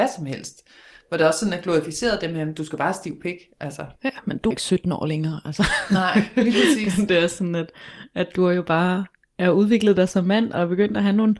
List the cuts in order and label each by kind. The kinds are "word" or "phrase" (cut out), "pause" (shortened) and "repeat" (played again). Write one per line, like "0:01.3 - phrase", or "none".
0:04.0 - pause
0:04.5 - word

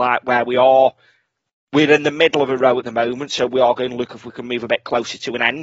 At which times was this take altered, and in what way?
none

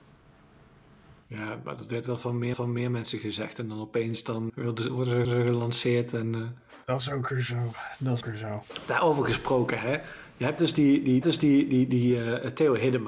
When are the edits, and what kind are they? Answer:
0:01.2 - pause
0:02.5 - repeat
0:04.5 - word
0:05.2 - repeat
0:06.8 - pause
0:08.2 - word
0:11.2 - repeat

